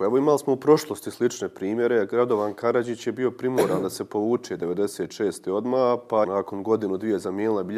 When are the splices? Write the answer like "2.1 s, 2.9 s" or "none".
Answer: 6.2 s